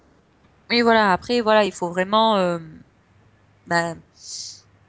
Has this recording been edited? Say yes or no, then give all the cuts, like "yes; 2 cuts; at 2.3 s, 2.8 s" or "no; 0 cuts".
no; 0 cuts